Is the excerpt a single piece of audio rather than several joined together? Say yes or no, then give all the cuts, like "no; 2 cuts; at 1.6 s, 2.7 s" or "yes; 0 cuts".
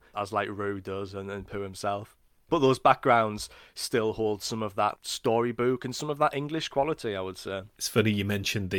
yes; 0 cuts